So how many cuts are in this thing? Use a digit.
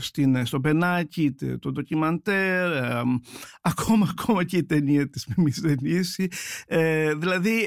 0